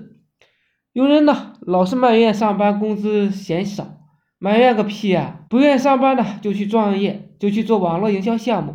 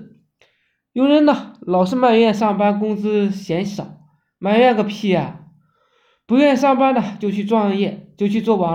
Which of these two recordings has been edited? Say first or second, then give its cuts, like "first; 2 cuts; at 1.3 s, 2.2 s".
first; 1 cut; at 5.5 s